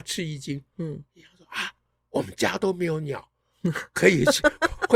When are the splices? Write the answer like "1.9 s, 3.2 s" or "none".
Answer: none